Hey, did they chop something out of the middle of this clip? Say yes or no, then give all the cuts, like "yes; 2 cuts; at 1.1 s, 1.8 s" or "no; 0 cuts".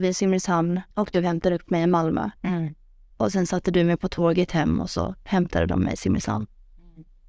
yes; 2 cuts; at 0.9 s, 2.4 s